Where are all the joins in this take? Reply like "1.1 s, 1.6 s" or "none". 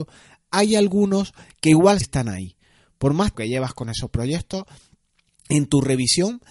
2.0 s, 3.3 s